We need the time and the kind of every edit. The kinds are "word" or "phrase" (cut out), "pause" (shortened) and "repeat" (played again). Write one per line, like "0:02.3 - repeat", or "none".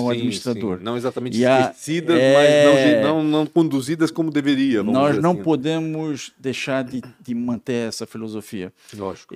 none